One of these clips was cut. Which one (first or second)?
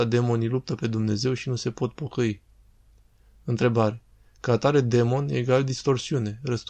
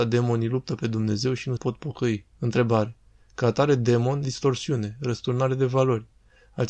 second